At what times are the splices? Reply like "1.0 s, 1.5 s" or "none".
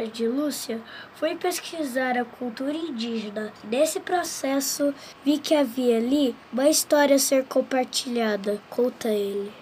3.6 s, 5.1 s, 6.4 s, 8.7 s